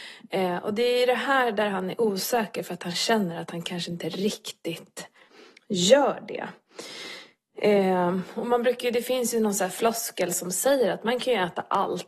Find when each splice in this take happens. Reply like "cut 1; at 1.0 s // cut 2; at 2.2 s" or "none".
none